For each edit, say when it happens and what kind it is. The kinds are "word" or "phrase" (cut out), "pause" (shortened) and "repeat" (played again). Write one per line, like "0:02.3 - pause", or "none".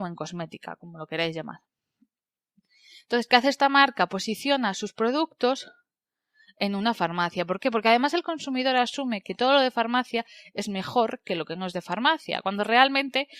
none